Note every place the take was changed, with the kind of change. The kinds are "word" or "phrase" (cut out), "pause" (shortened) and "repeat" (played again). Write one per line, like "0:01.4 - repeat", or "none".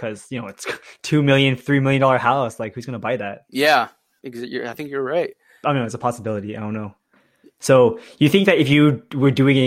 none